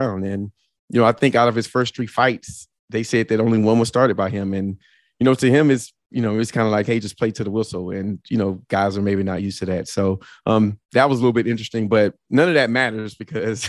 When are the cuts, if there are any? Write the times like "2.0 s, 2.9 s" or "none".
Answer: 10.8 s